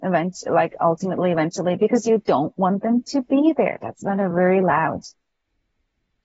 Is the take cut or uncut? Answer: uncut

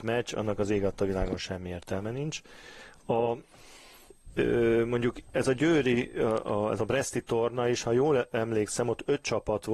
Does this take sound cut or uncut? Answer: uncut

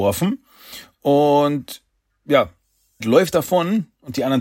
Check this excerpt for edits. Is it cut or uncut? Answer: cut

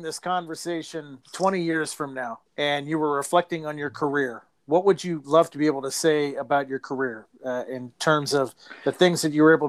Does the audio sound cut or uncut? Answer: cut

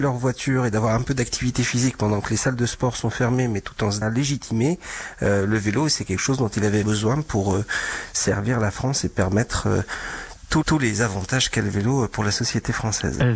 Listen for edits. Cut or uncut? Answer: cut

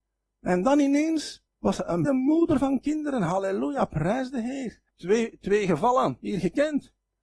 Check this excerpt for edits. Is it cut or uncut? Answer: cut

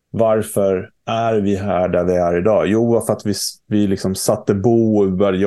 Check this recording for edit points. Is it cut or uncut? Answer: uncut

